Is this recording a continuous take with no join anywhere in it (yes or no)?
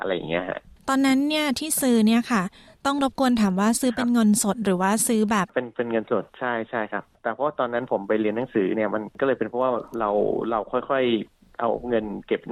yes